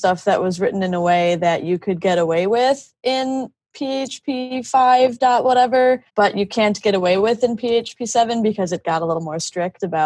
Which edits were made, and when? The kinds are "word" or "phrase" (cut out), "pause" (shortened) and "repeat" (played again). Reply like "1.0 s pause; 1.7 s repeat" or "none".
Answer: 6.1 s pause